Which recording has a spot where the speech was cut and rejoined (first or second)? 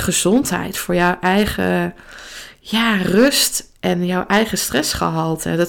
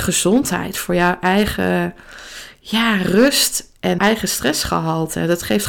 second